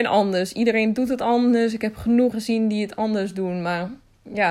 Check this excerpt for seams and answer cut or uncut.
cut